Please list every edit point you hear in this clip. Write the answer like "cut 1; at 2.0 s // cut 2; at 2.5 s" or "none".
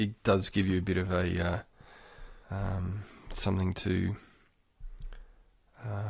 cut 1; at 2.4 s